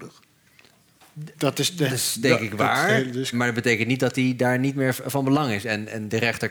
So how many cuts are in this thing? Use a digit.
2